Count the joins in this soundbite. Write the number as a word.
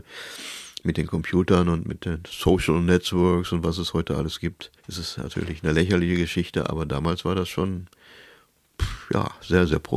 one